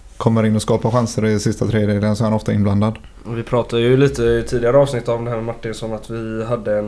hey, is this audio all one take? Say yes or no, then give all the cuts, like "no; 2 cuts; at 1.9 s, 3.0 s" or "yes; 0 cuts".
yes; 0 cuts